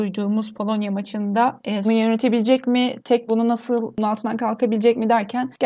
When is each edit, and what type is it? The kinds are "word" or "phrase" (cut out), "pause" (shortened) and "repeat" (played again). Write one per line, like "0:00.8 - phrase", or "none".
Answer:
0:01.8 - phrase
0:03.3 - phrase